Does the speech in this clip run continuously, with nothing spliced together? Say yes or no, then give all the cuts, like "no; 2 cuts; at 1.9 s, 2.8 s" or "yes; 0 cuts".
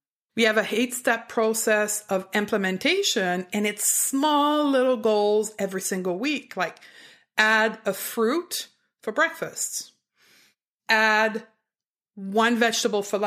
yes; 0 cuts